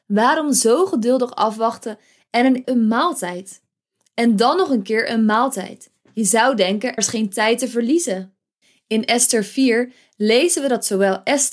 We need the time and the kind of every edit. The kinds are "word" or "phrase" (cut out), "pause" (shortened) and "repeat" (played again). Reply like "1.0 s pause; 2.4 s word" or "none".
2.6 s word; 7.0 s word